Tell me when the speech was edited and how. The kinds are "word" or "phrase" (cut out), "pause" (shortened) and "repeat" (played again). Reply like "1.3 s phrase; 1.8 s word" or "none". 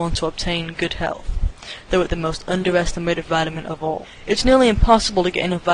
2.1 s word

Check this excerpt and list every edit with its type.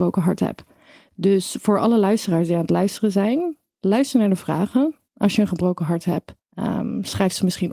5.1 s pause; 6.4 s pause

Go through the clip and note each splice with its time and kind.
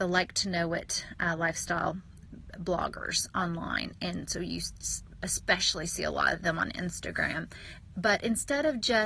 none

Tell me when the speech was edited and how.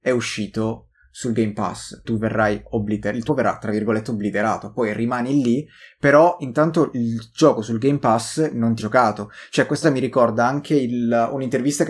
2.0 s word; 3.3 s word; 8.8 s word; 9.8 s word

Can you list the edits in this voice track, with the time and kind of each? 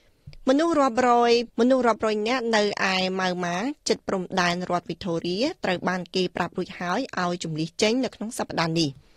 1.5 s pause

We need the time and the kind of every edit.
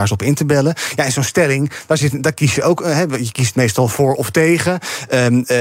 none

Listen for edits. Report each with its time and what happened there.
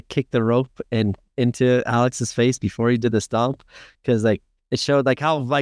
none

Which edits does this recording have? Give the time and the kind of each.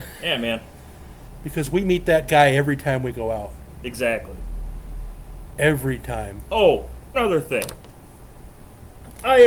7.1 s word

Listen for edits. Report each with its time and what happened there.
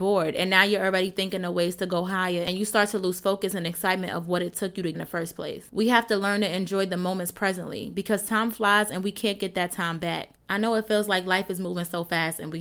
4.9 s phrase

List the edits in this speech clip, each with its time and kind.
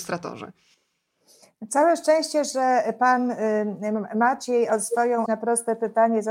5.3 s word

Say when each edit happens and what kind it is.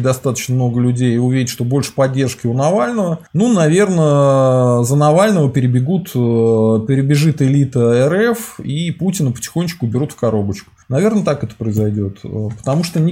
3.3 s pause; 10.8 s pause

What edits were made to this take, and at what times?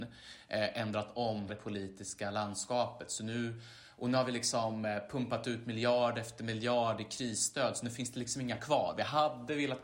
1.5 s word; 8.6 s word

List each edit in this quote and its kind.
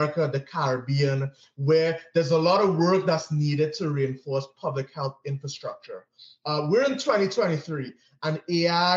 none

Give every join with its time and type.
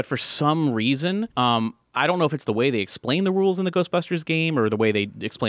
1.3 s pause

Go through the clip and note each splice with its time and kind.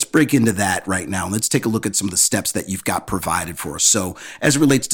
none

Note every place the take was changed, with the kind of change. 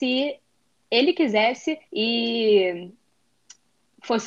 1.9 s pause

